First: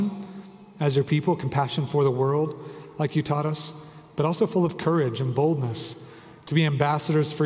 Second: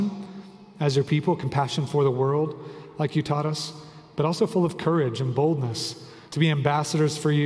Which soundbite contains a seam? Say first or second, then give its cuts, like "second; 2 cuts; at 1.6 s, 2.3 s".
second; 1 cut; at 6.2 s